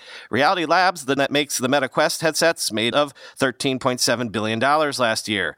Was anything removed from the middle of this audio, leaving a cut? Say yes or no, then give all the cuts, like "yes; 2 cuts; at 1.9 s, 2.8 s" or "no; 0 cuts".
yes; 2 cuts; at 1.2 s, 2.9 s